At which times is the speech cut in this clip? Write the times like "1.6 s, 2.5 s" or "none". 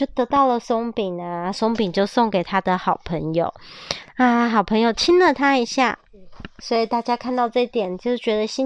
none